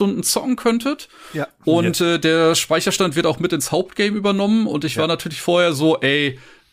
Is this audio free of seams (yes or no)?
yes